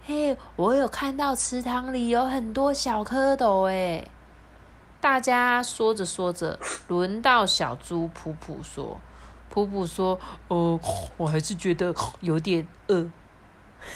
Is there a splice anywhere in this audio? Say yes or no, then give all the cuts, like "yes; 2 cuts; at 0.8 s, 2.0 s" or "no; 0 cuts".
no; 0 cuts